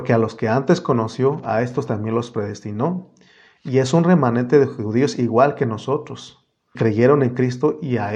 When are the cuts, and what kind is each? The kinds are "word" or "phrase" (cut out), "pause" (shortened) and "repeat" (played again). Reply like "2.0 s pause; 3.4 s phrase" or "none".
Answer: 6.7 s word